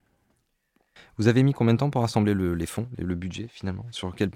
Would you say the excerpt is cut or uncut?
uncut